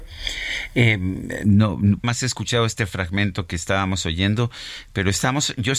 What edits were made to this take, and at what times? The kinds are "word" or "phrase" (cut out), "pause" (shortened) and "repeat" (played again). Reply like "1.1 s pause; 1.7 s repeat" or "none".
2.0 s phrase